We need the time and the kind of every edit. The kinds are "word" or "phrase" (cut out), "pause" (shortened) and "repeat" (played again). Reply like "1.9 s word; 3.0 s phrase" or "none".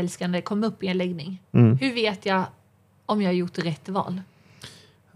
none